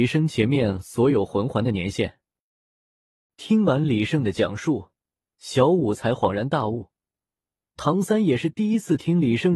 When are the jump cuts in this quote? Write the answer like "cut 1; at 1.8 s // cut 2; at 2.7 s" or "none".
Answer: none